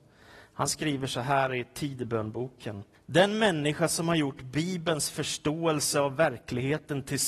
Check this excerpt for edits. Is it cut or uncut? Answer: cut